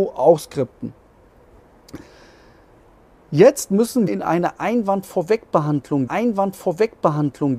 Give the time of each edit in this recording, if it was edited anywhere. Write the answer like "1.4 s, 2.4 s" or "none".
4.1 s, 6.1 s